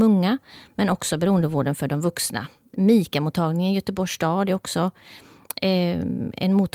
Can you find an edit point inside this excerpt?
no; 0 cuts

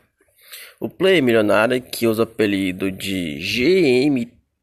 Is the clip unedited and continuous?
yes; 0 cuts

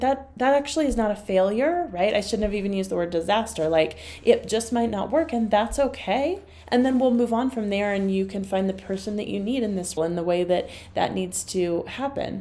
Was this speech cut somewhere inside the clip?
yes; 1 cut; at 10.0 s

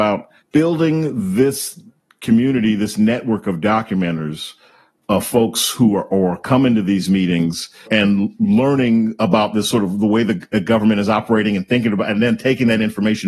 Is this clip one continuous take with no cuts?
yes; 0 cuts

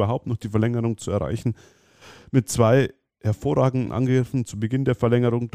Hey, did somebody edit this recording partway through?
no; 0 cuts

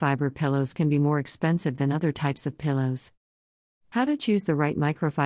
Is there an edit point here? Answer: no; 0 cuts

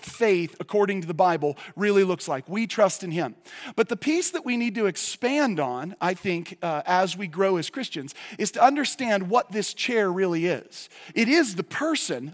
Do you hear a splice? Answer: no; 0 cuts

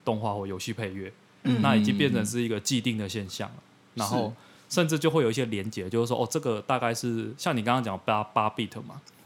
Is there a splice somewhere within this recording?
no; 0 cuts

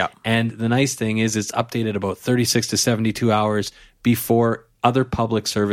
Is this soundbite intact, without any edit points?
yes; 0 cuts

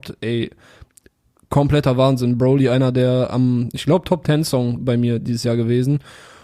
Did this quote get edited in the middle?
no; 0 cuts

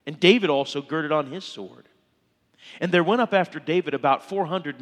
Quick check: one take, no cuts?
yes; 0 cuts

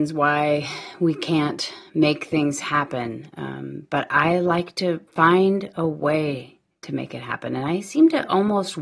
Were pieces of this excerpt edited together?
yes; 1 cut; at 5.1 s

